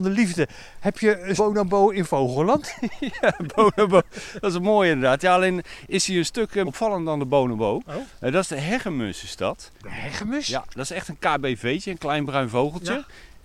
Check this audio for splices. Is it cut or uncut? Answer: cut